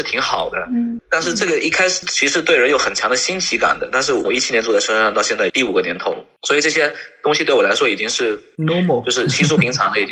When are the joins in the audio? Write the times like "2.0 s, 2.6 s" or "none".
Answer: none